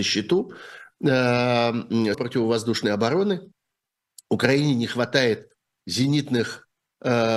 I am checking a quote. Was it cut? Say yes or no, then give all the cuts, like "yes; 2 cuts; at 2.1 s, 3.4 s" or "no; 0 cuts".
yes; 1 cut; at 2.1 s